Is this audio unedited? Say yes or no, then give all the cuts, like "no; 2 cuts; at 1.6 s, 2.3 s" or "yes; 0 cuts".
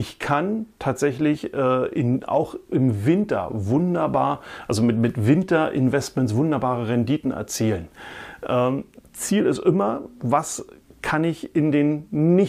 yes; 0 cuts